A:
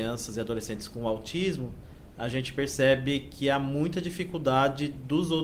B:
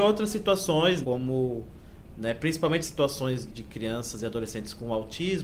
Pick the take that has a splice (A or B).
B